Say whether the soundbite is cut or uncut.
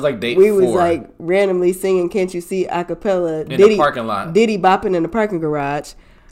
uncut